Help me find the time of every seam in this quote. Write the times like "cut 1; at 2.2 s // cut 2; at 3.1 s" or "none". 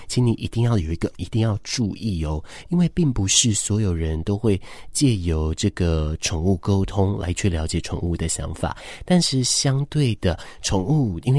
cut 1; at 1.1 s